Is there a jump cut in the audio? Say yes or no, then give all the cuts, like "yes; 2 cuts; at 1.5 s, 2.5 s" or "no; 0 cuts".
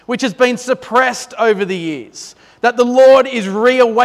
no; 0 cuts